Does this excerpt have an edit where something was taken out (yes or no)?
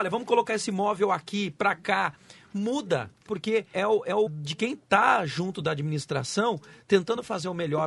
yes